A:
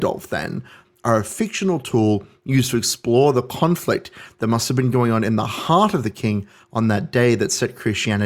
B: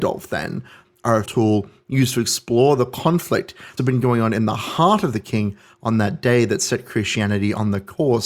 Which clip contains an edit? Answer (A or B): B